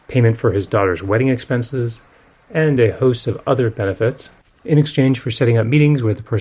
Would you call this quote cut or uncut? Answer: uncut